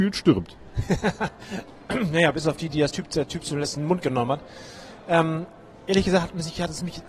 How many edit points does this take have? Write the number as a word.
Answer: zero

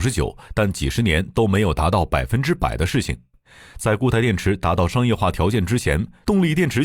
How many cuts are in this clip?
zero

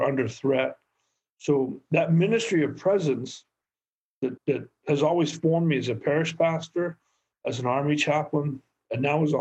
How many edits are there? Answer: one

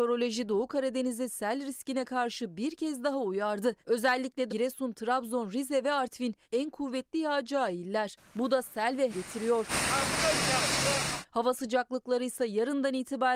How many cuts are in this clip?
four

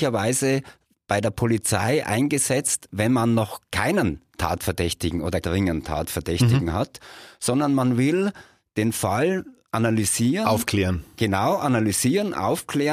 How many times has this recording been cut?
one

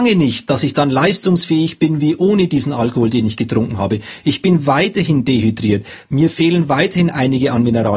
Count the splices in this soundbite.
zero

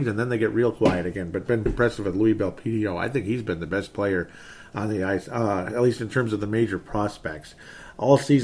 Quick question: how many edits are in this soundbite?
one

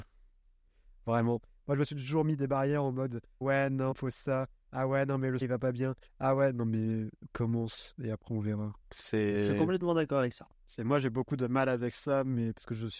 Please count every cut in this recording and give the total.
five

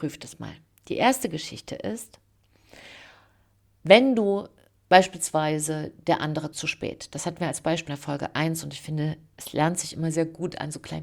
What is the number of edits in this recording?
two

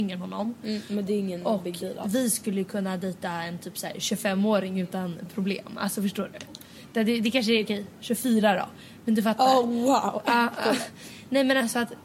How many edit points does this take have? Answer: zero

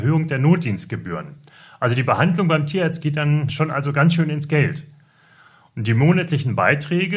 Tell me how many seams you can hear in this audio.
zero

